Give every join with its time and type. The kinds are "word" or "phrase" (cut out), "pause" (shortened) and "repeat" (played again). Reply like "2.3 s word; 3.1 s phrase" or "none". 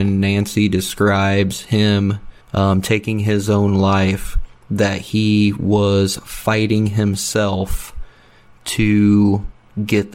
2.4 s pause